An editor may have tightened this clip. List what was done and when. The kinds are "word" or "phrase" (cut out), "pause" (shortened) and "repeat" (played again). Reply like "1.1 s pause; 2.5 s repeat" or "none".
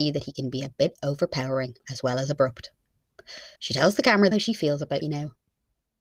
1.8 s pause; 3.6 s pause; 4.3 s phrase; 5.0 s word